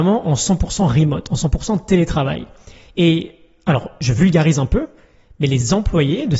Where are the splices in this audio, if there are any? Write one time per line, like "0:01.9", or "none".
none